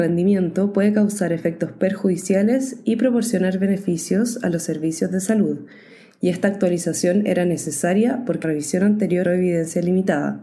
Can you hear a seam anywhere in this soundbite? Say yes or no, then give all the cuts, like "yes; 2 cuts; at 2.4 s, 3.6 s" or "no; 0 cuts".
yes; 2 cuts; at 8.4 s, 9.2 s